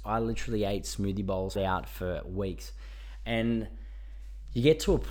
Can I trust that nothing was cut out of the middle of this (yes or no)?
no